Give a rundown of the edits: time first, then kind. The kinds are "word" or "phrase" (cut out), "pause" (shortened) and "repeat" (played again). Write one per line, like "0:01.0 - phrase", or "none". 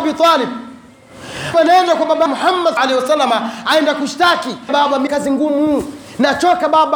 0:01.5 - word
0:02.3 - word
0:02.8 - word
0:04.7 - word
0:05.1 - word